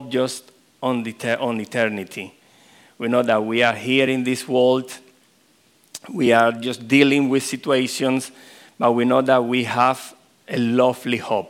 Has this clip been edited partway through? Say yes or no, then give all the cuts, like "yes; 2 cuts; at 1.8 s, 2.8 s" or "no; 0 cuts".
no; 0 cuts